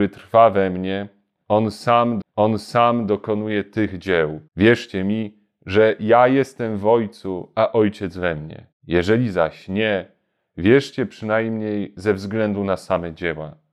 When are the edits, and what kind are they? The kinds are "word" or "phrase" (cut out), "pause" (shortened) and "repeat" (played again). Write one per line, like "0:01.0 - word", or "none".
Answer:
0:02.2 - repeat
0:04.5 - pause
0:08.7 - pause